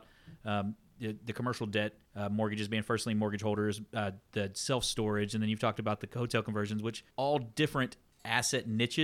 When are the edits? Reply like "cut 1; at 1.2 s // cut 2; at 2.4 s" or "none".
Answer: cut 1; at 2.0 s // cut 2; at 7.1 s